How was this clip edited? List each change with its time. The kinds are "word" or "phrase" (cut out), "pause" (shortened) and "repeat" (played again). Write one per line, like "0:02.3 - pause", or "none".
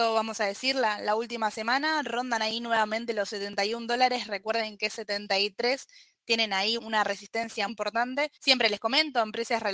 0:06.8 - word
0:07.7 - word
0:08.4 - pause